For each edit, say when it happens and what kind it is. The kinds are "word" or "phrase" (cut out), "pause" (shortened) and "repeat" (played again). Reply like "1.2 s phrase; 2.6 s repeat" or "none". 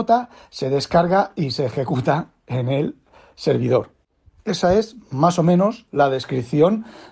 none

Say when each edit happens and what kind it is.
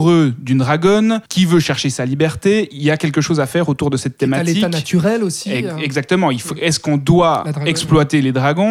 1.3 s pause

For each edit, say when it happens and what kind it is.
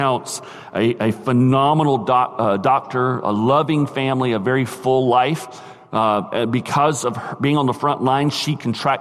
none

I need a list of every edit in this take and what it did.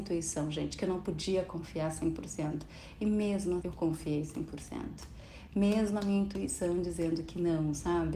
3.6 s word

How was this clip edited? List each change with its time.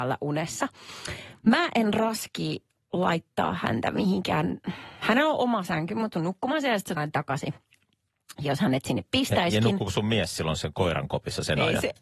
6.1 s phrase; 7.0 s word

